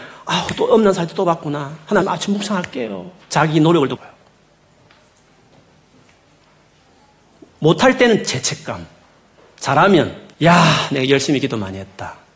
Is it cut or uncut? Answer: cut